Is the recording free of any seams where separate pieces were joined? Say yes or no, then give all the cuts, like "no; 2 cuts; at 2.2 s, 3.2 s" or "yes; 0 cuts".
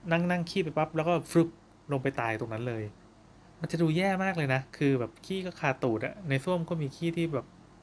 no; 1 cut; at 4.7 s